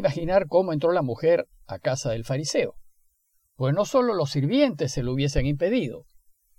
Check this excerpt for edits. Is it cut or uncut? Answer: uncut